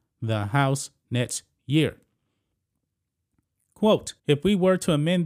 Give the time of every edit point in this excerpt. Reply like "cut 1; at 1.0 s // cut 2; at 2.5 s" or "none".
cut 1; at 4.2 s